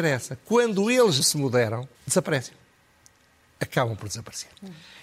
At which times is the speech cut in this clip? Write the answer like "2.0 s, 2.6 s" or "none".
1.2 s, 1.9 s